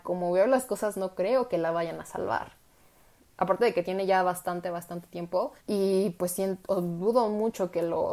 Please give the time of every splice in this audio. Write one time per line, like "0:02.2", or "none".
0:05.6